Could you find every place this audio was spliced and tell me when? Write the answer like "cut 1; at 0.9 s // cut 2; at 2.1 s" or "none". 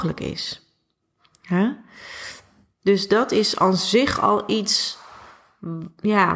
none

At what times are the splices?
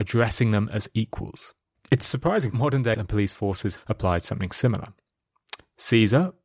cut 1; at 1.8 s // cut 2; at 2.5 s // cut 3; at 2.9 s // cut 4; at 3.8 s

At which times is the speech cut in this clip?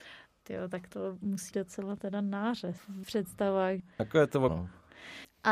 cut 1; at 1.5 s // cut 2; at 3.0 s // cut 3; at 4.5 s

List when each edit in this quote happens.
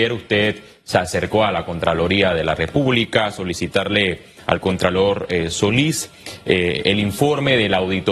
none

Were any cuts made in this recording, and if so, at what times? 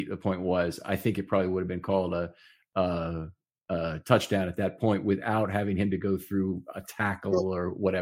none

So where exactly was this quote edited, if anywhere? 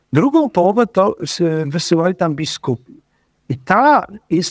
none

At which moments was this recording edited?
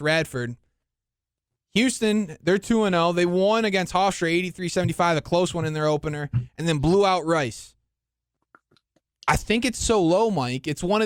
none

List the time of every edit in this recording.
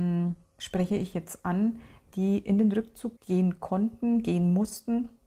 cut 1; at 3.2 s

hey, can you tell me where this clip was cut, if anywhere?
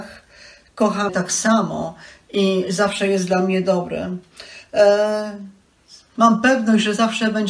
cut 1; at 1.1 s

